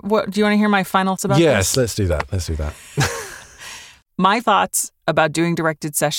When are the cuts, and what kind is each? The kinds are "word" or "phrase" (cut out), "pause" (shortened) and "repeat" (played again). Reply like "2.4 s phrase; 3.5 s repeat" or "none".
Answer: 1.2 s word; 4.4 s word